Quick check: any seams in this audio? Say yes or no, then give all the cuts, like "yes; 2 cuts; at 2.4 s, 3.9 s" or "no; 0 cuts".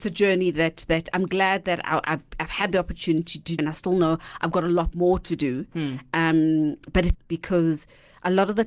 yes; 2 cuts; at 3.6 s, 7.1 s